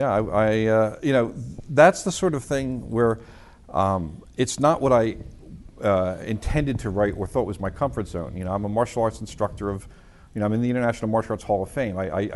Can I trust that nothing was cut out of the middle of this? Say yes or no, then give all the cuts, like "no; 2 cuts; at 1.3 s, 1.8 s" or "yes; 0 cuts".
yes; 0 cuts